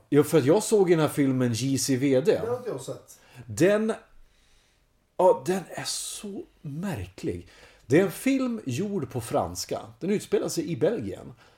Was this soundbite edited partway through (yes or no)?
no